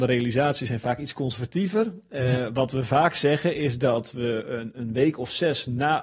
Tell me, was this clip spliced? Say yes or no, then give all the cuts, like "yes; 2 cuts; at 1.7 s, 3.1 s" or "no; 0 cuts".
no; 0 cuts